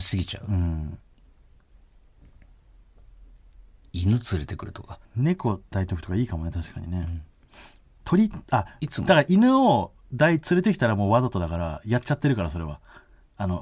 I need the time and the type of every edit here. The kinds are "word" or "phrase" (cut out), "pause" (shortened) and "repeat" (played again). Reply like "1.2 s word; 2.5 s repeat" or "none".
3.8 s pause; 5.0 s pause; 7.9 s pause